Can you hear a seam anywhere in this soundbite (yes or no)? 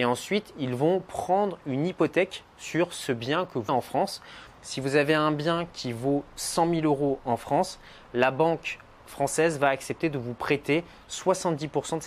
yes